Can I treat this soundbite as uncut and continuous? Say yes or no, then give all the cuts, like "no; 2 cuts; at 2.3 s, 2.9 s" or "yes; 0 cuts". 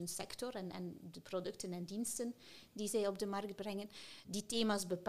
yes; 0 cuts